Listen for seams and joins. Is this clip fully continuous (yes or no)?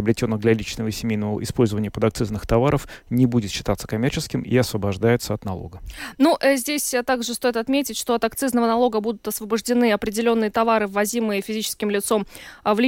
yes